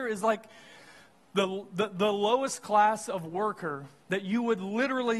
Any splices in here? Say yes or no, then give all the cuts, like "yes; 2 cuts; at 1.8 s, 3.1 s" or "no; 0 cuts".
no; 0 cuts